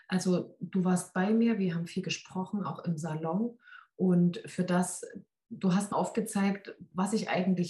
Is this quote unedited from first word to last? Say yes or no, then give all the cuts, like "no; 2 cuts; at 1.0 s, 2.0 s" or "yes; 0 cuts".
no; 1 cut; at 5.9 s